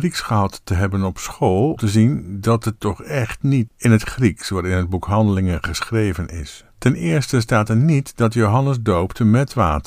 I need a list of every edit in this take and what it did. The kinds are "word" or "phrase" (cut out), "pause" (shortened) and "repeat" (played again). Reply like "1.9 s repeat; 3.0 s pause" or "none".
1.8 s word; 2.8 s word; 3.7 s word; 6.7 s pause